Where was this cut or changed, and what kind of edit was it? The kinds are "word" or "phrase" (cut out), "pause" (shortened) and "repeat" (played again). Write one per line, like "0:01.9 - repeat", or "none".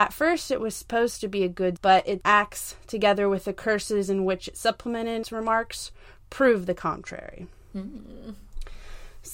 0:01.8 - word
0:02.2 - word
0:05.2 - word